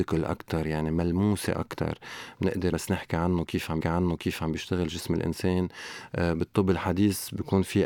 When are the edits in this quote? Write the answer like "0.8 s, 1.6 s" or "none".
2.7 s, 3.8 s